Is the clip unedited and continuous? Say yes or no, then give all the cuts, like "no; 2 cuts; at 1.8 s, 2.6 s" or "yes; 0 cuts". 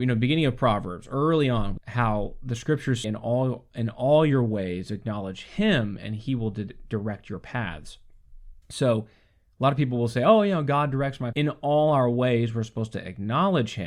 no; 4 cuts; at 1.8 s, 3.0 s, 8.6 s, 11.3 s